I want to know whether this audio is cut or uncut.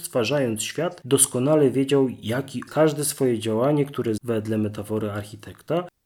cut